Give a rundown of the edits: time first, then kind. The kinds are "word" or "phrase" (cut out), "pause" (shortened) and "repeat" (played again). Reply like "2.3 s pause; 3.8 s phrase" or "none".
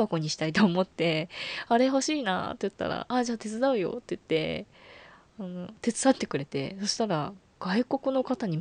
none